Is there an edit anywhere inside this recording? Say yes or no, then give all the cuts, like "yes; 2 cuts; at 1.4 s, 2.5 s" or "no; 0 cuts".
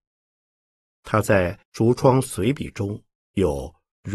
yes; 2 cuts; at 1.6 s, 3.2 s